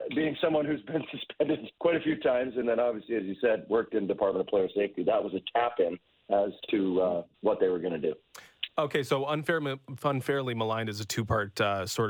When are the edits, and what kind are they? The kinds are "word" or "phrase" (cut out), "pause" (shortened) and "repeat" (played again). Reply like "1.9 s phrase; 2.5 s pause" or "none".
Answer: 1.7 s pause; 6.1 s pause; 7.3 s pause